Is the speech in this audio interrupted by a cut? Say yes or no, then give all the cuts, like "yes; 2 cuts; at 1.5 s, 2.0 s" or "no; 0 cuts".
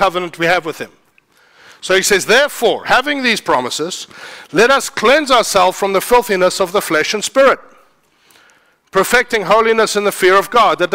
no; 0 cuts